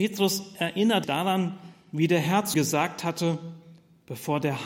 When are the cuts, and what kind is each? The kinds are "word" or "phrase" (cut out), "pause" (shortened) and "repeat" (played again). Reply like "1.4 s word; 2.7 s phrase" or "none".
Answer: 1.0 s word; 2.5 s word